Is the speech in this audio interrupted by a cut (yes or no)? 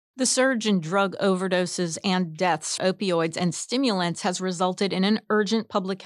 yes